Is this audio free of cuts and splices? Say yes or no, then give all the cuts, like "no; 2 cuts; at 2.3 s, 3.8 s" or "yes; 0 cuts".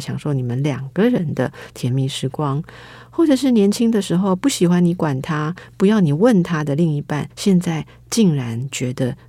no; 1 cut; at 7.3 s